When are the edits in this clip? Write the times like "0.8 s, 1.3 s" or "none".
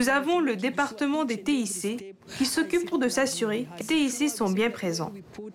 2.9 s, 3.8 s